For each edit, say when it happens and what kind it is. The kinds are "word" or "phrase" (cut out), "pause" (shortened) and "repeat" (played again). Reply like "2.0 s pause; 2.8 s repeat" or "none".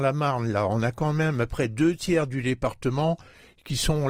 1.5 s word